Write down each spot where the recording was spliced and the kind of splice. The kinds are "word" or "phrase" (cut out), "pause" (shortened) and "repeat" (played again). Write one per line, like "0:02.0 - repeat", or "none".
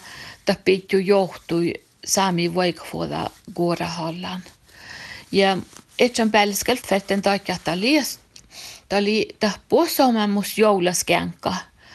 0:06.8 - word